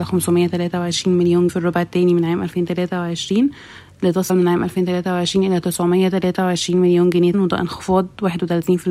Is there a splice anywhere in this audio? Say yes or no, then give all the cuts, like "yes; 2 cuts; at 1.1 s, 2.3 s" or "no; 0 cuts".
yes; 3 cuts; at 1.5 s, 4.3 s, 7.3 s